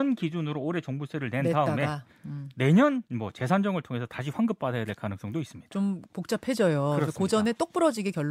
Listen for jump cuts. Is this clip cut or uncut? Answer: cut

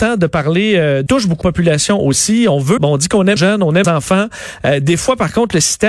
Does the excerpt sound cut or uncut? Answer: cut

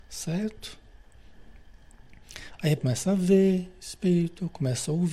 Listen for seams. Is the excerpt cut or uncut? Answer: cut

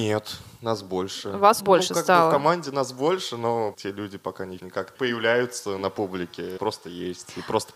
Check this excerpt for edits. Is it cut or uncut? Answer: cut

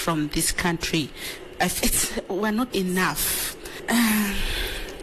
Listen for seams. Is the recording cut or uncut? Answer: cut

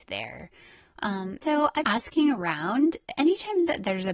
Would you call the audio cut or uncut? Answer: cut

